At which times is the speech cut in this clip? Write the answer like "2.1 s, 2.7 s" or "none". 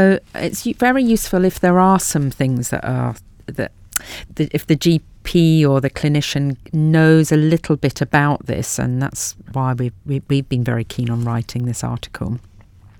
4.3 s, 9.5 s